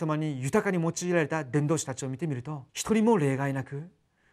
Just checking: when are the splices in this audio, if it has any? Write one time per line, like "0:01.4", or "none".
0:02.7